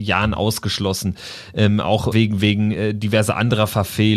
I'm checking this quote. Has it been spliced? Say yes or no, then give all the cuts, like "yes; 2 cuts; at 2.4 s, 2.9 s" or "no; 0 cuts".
yes; 1 cut; at 2.1 s